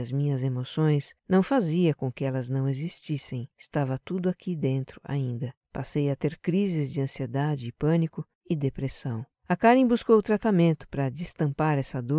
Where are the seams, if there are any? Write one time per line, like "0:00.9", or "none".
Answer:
0:01.2
0:03.5
0:05.6
0:08.3
0:09.3

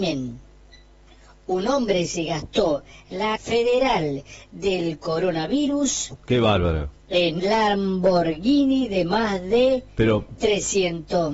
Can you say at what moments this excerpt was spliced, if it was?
0:03.4
0:07.4

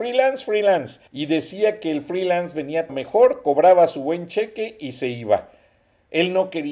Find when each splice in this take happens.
0:01.1
0:02.9

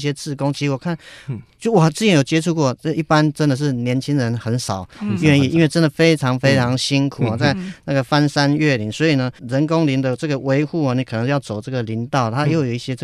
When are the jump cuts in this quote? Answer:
0:09.4

